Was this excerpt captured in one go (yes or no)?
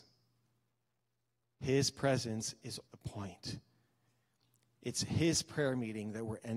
no